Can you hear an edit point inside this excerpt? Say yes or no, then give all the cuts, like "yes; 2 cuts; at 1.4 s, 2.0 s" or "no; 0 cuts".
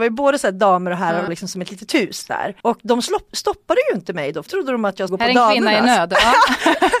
yes; 4 cuts; at 1.3 s, 2.6 s, 4.5 s, 5.1 s